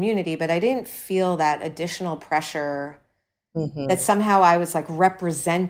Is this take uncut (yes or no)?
yes